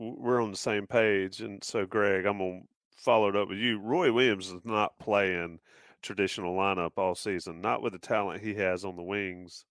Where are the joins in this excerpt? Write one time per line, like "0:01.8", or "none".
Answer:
none